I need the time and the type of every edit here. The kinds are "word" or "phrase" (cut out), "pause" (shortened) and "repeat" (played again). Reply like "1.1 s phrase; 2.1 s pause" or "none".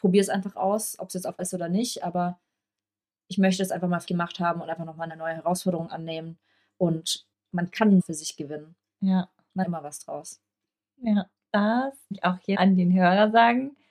1.4 s word; 4.1 s word; 5.1 s word; 7.3 s word; 8.0 s word; 9.6 s word; 12.1 s word; 12.5 s word